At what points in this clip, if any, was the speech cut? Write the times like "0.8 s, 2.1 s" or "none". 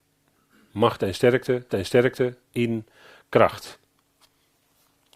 1.7 s